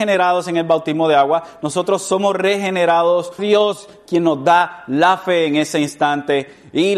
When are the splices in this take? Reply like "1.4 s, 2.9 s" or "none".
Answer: 3.4 s